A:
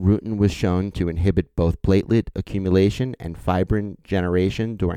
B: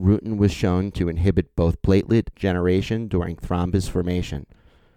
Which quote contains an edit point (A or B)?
B